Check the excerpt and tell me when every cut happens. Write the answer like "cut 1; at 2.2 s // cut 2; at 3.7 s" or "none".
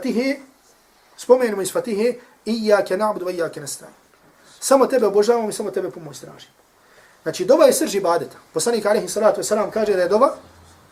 none